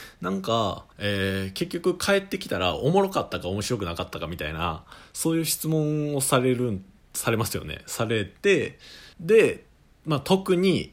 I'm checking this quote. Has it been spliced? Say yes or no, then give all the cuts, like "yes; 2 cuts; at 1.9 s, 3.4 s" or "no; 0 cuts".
yes; 2 cuts; at 0.9 s, 9.1 s